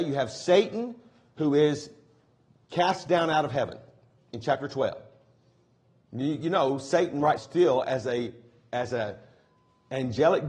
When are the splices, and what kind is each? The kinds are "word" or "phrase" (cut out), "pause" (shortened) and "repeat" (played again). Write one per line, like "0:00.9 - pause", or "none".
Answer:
0:07.4 - word